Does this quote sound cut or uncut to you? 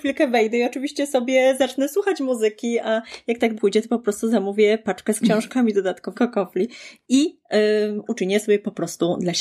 cut